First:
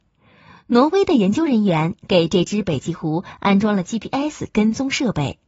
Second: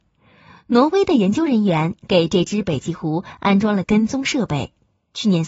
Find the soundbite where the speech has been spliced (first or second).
second